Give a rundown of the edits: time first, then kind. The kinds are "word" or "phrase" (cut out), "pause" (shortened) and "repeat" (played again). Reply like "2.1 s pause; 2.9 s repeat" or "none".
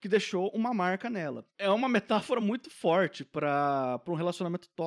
none